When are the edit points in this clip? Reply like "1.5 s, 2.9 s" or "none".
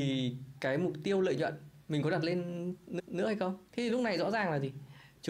3.0 s, 3.7 s